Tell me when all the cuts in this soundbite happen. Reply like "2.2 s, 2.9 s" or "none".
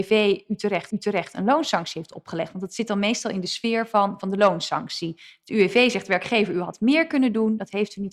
0.9 s